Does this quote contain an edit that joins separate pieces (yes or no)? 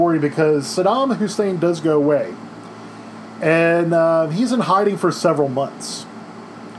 no